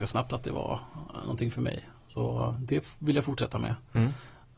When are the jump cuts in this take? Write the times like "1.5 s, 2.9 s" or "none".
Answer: none